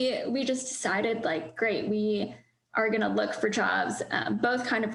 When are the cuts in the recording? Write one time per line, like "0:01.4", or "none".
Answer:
none